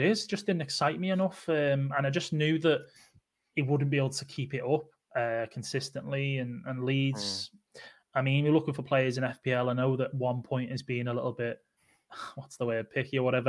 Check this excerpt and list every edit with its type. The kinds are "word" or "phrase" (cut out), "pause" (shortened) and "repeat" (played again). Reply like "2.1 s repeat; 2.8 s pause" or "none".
none